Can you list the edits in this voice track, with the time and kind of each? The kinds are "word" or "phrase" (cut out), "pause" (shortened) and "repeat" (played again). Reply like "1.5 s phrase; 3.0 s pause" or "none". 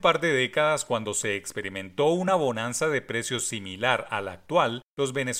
none